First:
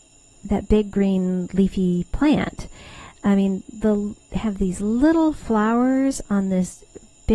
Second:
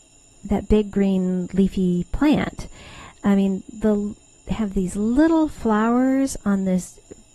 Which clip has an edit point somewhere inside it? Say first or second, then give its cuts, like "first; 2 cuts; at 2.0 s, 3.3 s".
first; 1 cut; at 4.2 s